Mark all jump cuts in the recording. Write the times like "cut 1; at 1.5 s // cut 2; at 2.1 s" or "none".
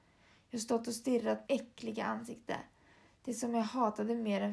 cut 1; at 1.5 s